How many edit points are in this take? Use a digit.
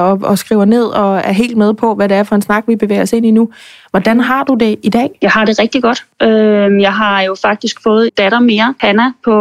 1